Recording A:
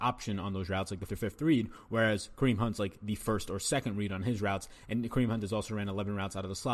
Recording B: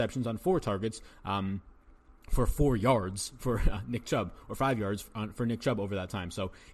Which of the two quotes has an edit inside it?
A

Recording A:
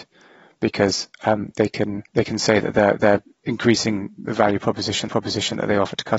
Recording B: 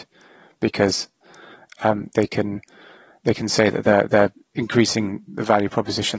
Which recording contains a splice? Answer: A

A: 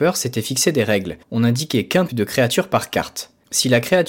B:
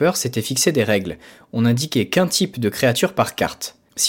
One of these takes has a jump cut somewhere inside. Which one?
A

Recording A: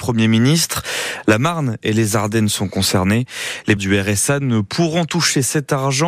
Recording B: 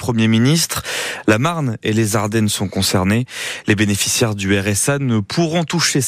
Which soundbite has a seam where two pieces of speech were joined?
A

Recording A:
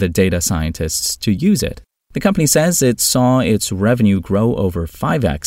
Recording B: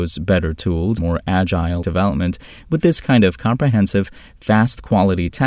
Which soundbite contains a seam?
B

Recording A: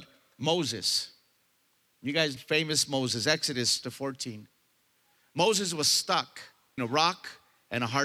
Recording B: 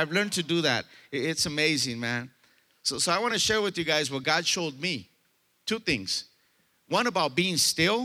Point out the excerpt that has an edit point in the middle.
A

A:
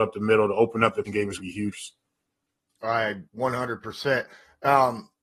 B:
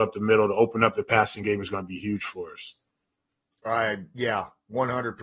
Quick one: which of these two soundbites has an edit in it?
A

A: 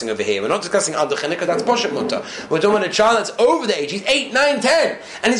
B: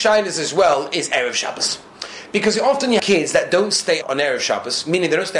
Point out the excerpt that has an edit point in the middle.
B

